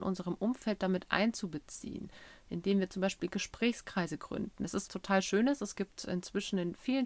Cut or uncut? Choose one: cut